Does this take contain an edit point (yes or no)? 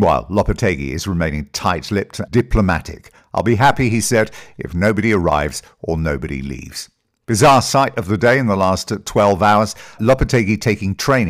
yes